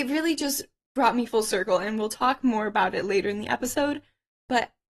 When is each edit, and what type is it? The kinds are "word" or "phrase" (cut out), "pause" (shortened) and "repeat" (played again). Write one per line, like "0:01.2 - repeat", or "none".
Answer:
none